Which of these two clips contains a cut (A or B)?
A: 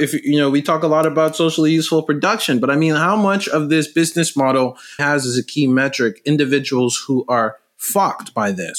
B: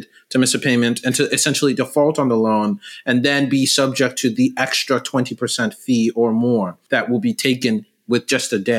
A